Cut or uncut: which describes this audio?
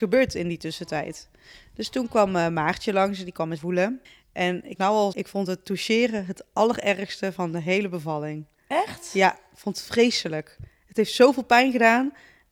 cut